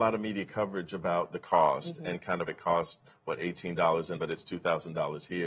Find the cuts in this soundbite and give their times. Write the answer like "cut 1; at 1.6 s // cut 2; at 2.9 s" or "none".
cut 1; at 2.5 s // cut 2; at 4.2 s